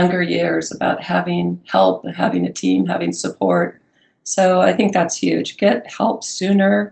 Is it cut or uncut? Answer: uncut